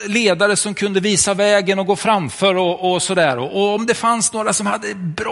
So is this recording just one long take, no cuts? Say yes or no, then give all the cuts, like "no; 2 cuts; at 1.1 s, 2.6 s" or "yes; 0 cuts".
yes; 0 cuts